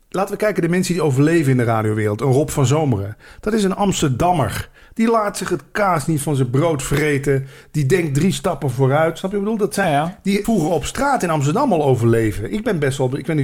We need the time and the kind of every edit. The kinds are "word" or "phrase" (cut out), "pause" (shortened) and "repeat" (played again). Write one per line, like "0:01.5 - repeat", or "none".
0:09.8 - word
0:10.4 - word